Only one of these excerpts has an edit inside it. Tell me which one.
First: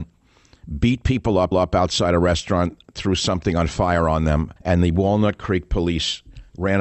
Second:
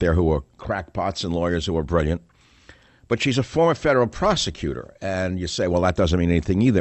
first; 2 cuts; at 1.5 s, 4.6 s

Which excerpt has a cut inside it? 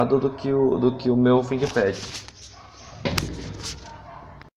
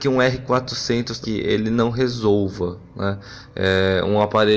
second; 1 cut; at 1.2 s

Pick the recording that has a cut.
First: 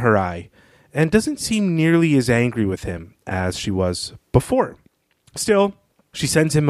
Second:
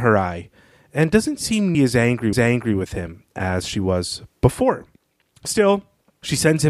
second; 2 cuts; at 1.7 s, 2.3 s

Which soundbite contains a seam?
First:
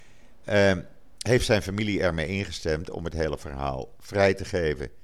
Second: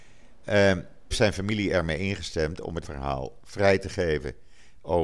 second; 2 cuts; at 1.1 s, 2.8 s

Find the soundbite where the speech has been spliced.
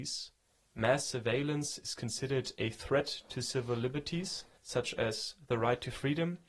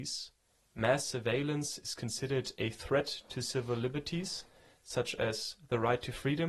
first; 1 cut; at 4.5 s

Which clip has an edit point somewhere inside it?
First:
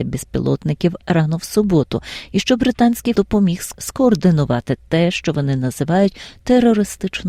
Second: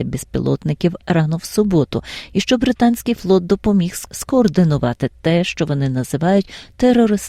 first; 1 cut; at 3.1 s

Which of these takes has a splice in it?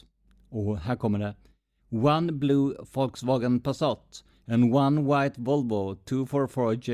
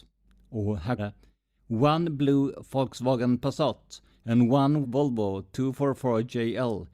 second; 2 cuts; at 1.0 s, 4.8 s

